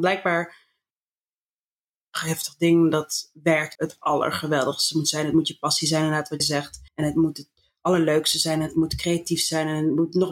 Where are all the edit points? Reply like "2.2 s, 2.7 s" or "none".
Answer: 3.7 s, 6.4 s, 6.9 s